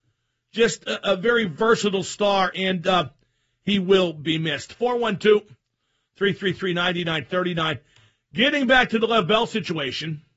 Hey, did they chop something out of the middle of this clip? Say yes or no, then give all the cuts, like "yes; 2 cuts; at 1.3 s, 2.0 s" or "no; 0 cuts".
no; 0 cuts